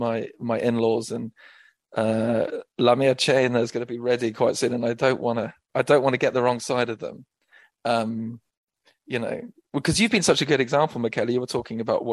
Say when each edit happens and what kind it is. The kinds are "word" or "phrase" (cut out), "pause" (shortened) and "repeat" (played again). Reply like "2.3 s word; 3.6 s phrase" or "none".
none